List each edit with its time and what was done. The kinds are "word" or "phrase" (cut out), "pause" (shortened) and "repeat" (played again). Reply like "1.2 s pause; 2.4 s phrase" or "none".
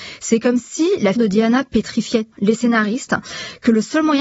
1.1 s word; 2.3 s word